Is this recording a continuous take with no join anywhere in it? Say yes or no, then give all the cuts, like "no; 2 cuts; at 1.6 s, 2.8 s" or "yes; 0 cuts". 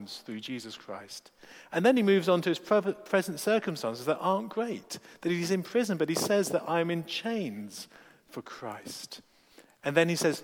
yes; 0 cuts